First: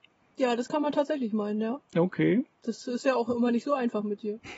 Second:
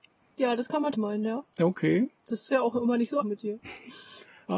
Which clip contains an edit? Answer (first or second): second